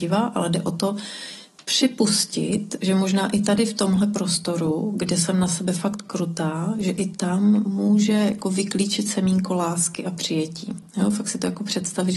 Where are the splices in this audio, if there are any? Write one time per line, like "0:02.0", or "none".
none